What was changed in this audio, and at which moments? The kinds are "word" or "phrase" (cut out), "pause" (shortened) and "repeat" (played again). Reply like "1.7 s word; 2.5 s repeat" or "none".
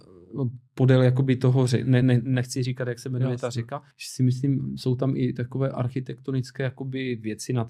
2.0 s word; 3.9 s pause